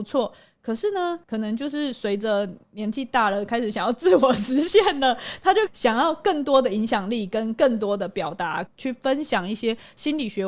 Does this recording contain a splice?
yes; 1 cut; at 1.2 s

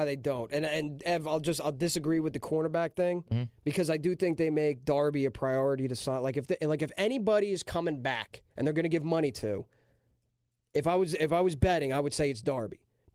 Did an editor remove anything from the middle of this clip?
yes; 1 cut; at 8.5 s

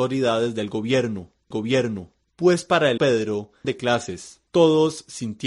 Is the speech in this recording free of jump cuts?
no; 3 cuts; at 1.5 s, 3.0 s, 3.6 s

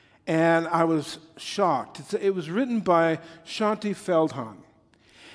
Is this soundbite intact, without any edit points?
yes; 0 cuts

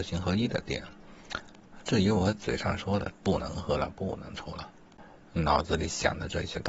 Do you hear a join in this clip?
no; 0 cuts

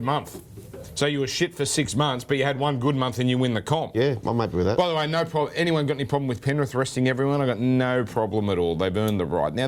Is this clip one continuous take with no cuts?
yes; 0 cuts

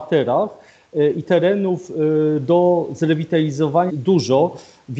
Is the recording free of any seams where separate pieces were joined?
no; 2 cuts; at 1.2 s, 3.9 s

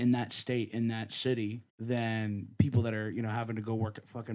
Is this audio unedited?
no; 1 cut; at 1.7 s

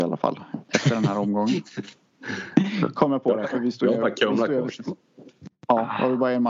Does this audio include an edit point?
no; 0 cuts

